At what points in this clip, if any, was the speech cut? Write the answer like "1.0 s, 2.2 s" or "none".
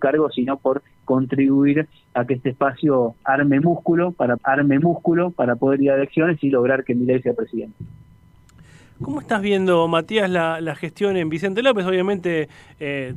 4.4 s